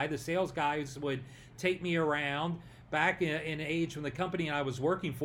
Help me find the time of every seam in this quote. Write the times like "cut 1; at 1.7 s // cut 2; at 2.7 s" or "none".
none

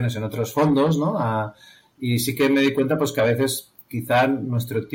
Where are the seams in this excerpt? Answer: none

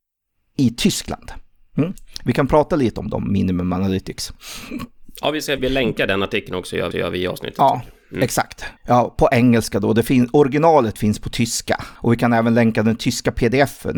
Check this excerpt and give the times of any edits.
cut 1; at 5.6 s // cut 2; at 6.9 s // cut 3; at 8.8 s // cut 4; at 12.0 s

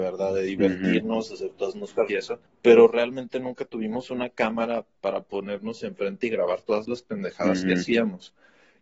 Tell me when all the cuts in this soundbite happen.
cut 1; at 2.1 s // cut 2; at 2.5 s

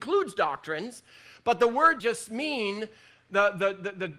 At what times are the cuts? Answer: cut 1; at 2.0 s

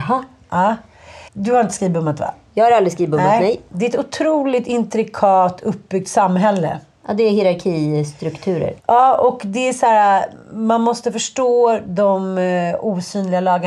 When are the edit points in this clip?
cut 1; at 1.3 s // cut 2; at 8.8 s

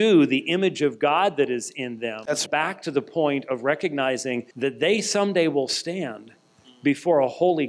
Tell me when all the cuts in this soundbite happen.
cut 1; at 2.5 s // cut 2; at 4.5 s

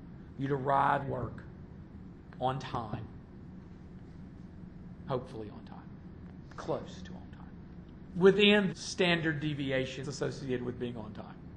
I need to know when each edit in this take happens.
cut 1; at 1.0 s // cut 2; at 8.7 s // cut 3; at 10.0 s

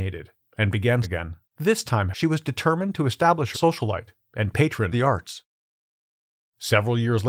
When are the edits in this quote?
cut 1; at 1.0 s // cut 2; at 1.4 s // cut 3; at 2.1 s // cut 4; at 3.5 s // cut 5; at 4.9 s

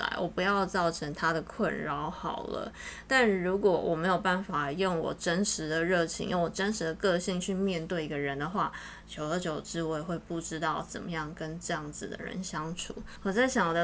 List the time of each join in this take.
none

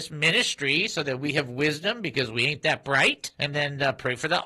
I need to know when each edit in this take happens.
cut 1; at 3.3 s

